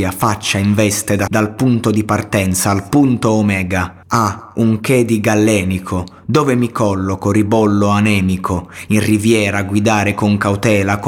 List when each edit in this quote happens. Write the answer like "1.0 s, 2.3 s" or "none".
1.3 s, 4.0 s